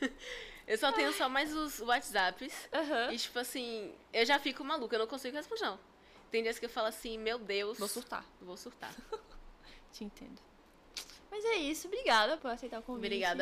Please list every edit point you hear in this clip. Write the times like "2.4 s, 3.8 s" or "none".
5.6 s, 12.4 s